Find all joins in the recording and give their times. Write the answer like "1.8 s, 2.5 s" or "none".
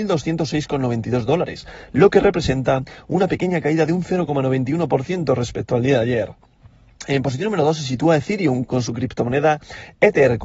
8.6 s